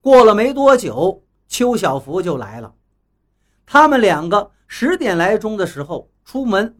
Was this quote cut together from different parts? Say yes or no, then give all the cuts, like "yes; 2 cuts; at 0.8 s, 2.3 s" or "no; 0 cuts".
no; 0 cuts